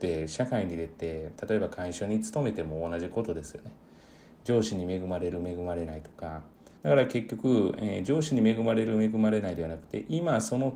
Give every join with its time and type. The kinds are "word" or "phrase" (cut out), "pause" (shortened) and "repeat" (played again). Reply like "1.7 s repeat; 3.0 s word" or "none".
6.8 s pause